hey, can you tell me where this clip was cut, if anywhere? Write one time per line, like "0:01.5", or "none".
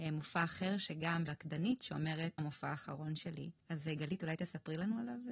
0:01.3
0:02.4
0:03.6